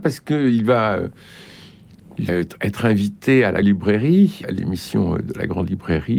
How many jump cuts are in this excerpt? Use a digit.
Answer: 3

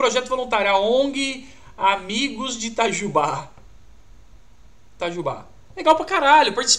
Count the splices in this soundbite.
0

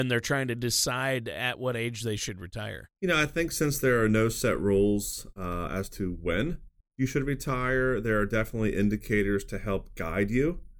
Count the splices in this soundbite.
2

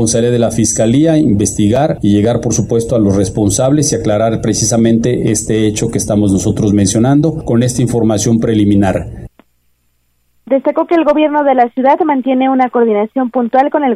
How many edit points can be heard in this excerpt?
0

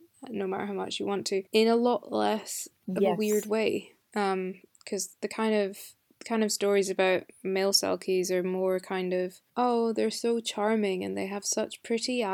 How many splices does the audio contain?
4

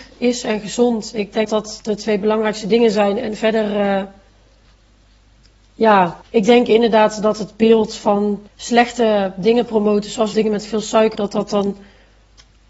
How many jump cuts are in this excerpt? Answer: 5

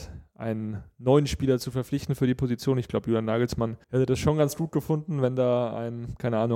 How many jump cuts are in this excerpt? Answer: 1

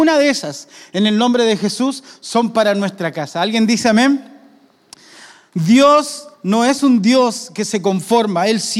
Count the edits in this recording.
1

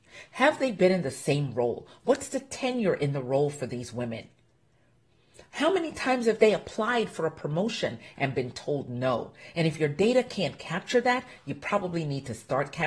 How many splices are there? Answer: 0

